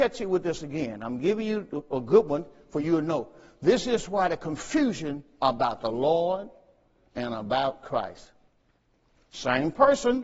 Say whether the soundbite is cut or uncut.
uncut